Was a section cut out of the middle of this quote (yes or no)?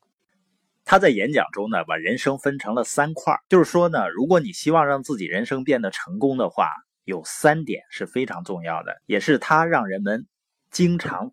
yes